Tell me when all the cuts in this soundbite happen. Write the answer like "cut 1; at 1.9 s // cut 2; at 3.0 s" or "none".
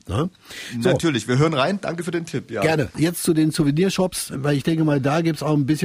none